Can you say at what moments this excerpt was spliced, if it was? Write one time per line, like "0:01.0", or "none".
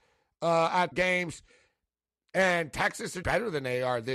0:00.9
0:03.2